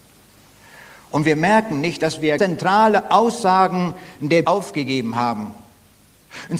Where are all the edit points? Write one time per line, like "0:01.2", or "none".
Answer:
0:02.4
0:04.4